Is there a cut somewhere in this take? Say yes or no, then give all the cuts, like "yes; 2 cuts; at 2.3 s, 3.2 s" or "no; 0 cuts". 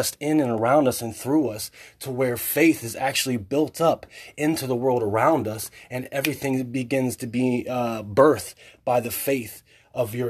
no; 0 cuts